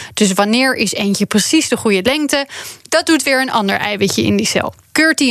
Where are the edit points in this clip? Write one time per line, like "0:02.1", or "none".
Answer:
0:02.8